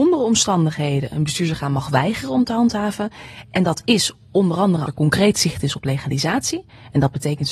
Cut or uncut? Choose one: cut